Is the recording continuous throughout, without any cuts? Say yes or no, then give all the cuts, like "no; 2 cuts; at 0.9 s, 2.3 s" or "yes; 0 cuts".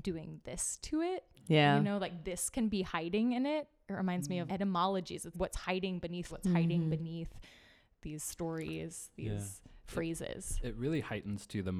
no; 3 cuts; at 4.5 s, 5.3 s, 6.3 s